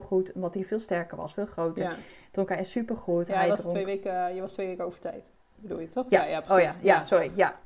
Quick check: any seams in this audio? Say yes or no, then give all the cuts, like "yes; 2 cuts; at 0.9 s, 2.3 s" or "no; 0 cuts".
no; 0 cuts